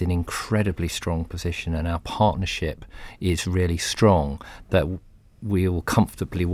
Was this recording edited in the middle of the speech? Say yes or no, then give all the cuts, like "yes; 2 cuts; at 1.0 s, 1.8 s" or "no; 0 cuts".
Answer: no; 0 cuts